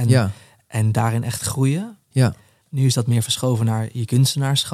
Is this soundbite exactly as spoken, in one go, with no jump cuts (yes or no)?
yes